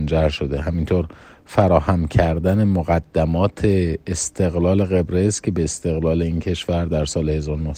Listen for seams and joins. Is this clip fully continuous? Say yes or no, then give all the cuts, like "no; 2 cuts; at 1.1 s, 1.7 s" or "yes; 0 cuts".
yes; 0 cuts